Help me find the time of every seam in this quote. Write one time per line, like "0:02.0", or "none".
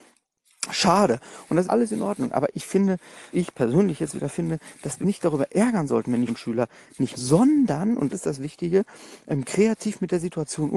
0:01.6
0:03.3
0:05.0
0:06.3
0:07.2
0:08.1